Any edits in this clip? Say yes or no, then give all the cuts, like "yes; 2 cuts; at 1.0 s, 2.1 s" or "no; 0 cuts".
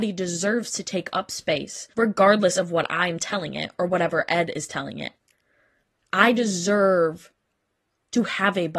yes; 1 cut; at 1.9 s